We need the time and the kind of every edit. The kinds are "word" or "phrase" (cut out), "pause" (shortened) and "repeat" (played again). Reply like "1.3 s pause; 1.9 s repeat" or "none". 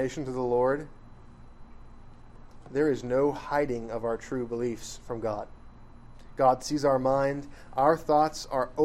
none